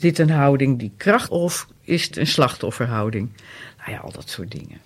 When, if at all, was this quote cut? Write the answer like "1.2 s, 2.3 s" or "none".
1.3 s, 2.1 s